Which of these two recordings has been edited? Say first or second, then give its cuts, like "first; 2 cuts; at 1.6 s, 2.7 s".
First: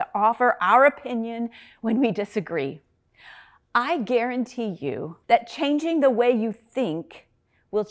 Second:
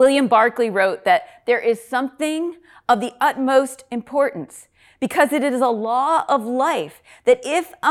first; 1 cut; at 5.2 s